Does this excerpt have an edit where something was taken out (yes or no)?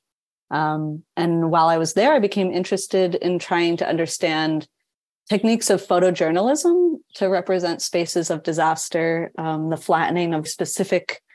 yes